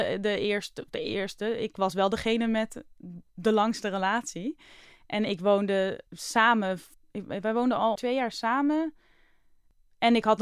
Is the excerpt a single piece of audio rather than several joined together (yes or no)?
no